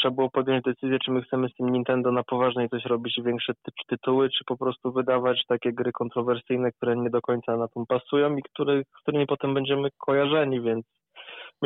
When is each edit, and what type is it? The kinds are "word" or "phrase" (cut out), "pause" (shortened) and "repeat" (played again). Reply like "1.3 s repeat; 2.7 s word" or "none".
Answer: 7.9 s word